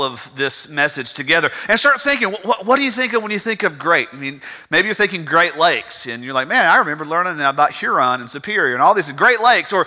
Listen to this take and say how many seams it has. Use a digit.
0